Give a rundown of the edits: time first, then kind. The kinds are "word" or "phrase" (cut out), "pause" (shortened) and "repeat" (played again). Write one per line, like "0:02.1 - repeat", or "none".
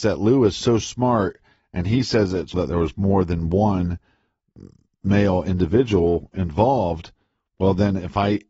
0:02.5 - word